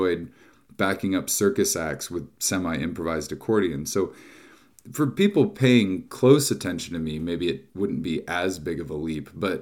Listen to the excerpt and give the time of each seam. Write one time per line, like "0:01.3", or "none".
0:07.7